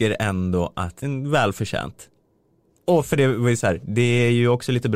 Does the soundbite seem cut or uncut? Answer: cut